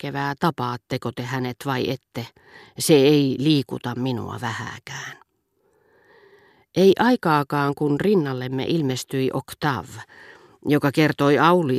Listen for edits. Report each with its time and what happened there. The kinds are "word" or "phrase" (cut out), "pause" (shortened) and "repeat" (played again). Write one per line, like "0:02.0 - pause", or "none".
none